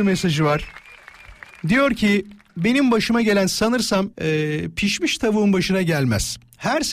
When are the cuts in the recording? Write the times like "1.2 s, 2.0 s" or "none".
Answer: 4.1 s